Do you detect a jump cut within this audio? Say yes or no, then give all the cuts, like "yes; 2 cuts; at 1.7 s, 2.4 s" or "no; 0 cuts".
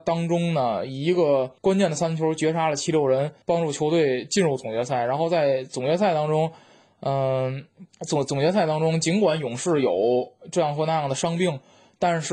yes; 3 cuts; at 1.6 s, 3.4 s, 7.9 s